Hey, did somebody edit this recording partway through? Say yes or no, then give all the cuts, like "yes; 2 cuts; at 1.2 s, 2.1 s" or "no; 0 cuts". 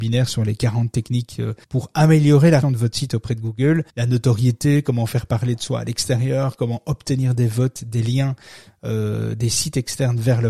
yes; 3 cuts; at 1.6 s, 2.6 s, 3.9 s